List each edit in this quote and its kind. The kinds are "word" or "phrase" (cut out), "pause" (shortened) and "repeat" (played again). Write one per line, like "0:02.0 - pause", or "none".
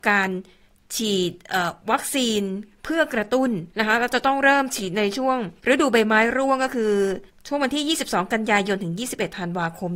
0:03.7 - pause
0:05.6 - pause
0:07.3 - pause